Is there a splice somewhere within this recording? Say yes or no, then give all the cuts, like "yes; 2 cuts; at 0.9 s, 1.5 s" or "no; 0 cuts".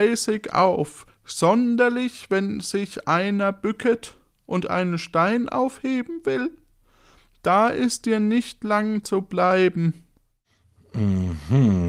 no; 0 cuts